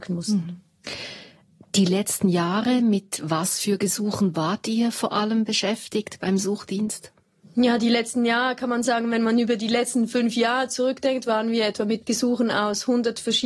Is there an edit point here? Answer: no; 0 cuts

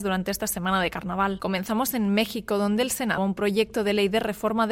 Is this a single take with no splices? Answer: no; 1 cut; at 3.2 s

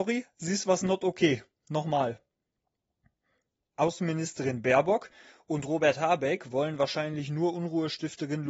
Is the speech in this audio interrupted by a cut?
no; 0 cuts

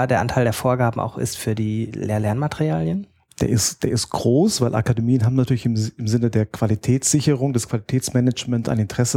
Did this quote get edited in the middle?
no; 0 cuts

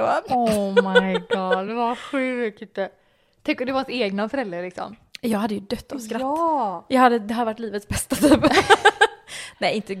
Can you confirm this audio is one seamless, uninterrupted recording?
yes; 0 cuts

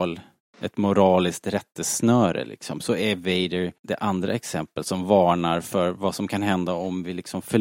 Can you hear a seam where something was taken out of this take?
yes; 1 cut; at 3.8 s

